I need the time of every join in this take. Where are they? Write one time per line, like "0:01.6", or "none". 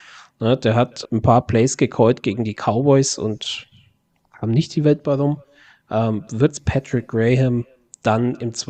0:01.0